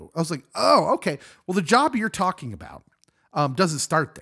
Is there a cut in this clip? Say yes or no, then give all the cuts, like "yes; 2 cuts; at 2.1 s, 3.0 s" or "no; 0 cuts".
no; 0 cuts